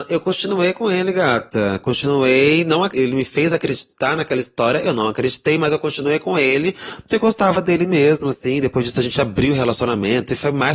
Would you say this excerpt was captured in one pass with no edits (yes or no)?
no